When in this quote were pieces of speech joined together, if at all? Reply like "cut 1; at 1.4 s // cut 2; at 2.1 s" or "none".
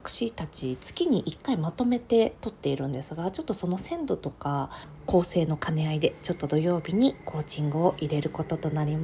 none